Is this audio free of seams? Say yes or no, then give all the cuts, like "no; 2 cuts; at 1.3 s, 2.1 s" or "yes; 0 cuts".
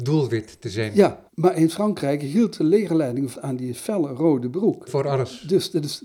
no; 3 cuts; at 1.3 s, 3.3 s, 4.9 s